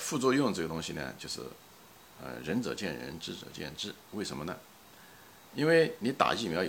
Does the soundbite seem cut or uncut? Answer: uncut